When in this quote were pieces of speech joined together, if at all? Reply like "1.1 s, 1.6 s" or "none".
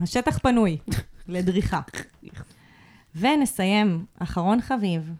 none

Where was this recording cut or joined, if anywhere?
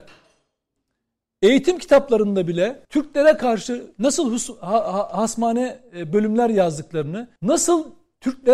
2.8 s, 7.4 s

